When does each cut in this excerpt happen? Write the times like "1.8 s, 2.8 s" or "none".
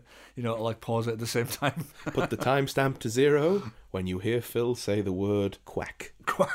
5.6 s